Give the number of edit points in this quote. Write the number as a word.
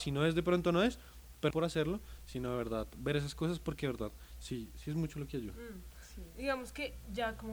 one